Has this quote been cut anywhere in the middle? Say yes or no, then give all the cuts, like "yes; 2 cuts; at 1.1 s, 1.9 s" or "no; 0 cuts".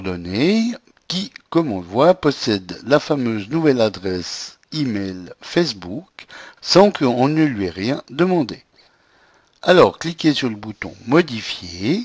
no; 0 cuts